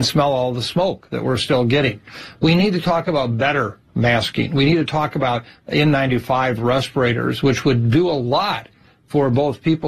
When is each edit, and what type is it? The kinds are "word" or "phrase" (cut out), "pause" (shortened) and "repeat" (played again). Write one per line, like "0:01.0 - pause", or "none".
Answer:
none